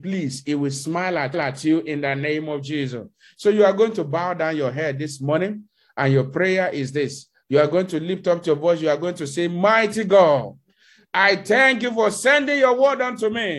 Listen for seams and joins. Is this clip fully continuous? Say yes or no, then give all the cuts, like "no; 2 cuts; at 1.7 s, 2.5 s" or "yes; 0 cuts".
no; 1 cut; at 1.3 s